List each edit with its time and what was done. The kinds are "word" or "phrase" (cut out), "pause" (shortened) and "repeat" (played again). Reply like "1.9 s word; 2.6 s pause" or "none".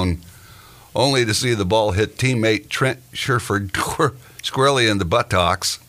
none

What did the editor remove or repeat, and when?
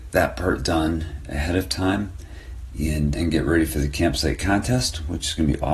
3.1 s word

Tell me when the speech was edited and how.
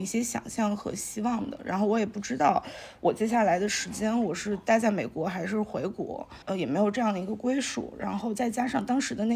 6.4 s pause

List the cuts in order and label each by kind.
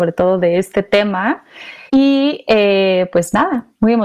1.9 s pause

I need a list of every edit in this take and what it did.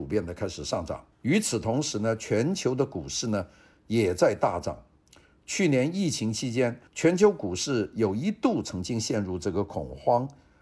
1.1 s pause; 6.9 s pause

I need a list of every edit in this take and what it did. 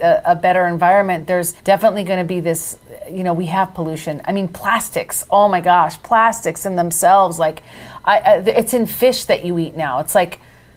1.6 s pause

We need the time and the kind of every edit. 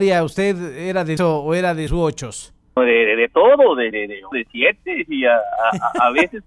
1.2 s word; 1.9 s word; 2.8 s word; 3.9 s word; 4.3 s word

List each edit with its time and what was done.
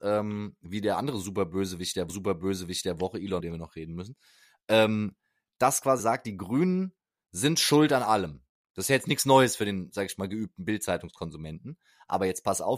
2.1 s repeat; 3.4 s phrase; 6.0 s word

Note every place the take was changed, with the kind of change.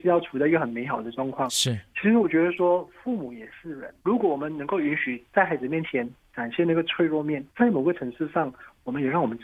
4.0 s pause; 7.5 s pause

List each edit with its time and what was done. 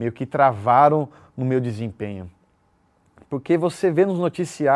none

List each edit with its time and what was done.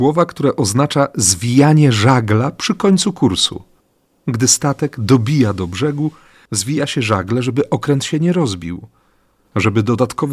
none

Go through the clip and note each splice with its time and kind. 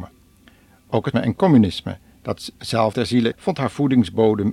1.1 s word; 2.9 s word; 3.3 s word

